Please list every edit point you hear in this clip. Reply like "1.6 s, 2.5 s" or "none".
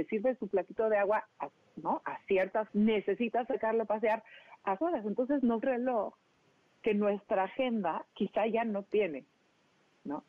1.3 s, 2.7 s, 4.8 s, 5.6 s, 8.1 s